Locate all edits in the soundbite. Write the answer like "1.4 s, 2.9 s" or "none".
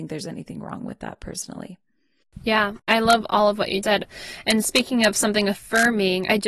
3.8 s